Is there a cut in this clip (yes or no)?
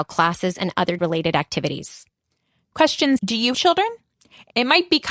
yes